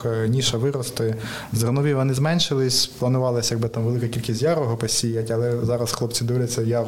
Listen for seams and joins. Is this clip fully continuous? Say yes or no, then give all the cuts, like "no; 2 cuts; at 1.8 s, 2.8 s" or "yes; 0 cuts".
yes; 0 cuts